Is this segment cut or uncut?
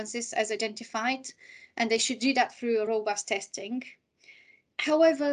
uncut